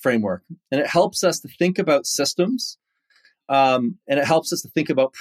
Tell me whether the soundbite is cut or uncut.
uncut